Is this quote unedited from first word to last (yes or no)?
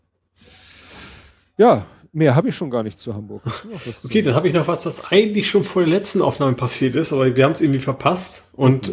yes